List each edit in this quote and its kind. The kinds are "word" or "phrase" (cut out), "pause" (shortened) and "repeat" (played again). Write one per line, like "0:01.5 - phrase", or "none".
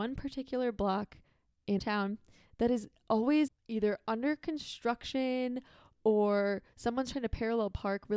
0:01.8 - word
0:03.5 - word